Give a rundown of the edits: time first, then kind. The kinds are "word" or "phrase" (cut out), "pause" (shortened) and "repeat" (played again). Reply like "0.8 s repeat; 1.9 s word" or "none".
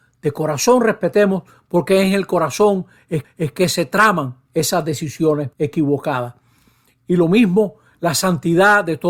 3.2 s repeat; 4.5 s word; 5.5 s pause

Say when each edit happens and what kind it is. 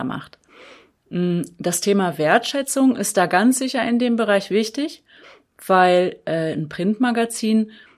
none

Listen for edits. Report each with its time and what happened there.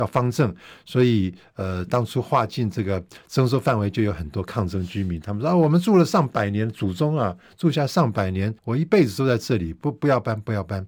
8.6 s pause

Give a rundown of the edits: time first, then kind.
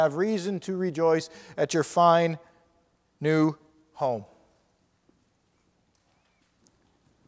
none

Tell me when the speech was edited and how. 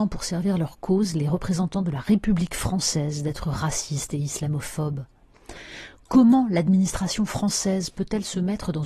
none

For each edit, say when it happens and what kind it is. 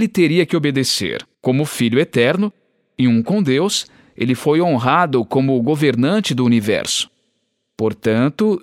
1.3 s pause

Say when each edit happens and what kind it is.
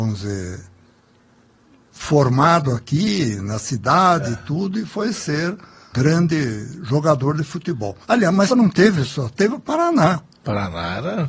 5.9 s word; 8.0 s pause; 8.5 s word

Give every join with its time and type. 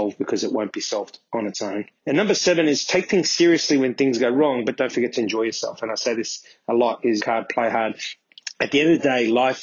2.0 s pause; 7.2 s word

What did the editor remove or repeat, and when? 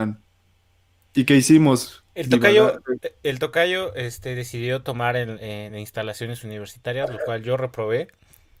none

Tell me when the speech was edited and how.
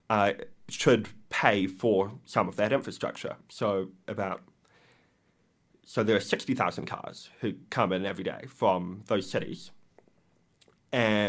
none

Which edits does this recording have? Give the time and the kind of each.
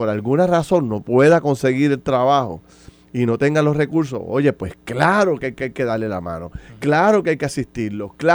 5.6 s repeat

